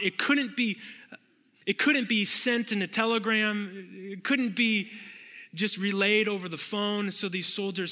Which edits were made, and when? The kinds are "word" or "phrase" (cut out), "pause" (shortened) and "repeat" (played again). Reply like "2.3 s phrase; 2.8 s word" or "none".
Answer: none